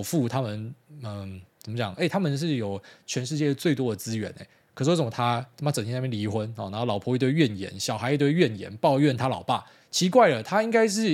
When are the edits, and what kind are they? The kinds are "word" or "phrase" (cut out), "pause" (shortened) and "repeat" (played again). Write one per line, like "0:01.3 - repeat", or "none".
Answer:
none